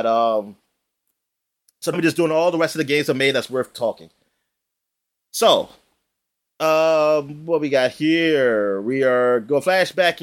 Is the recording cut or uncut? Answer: cut